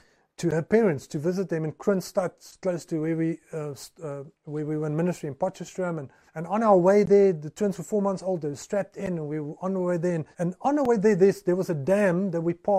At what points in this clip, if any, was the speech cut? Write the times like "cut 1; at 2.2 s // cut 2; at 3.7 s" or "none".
cut 1; at 4.3 s // cut 2; at 6.3 s // cut 3; at 10.3 s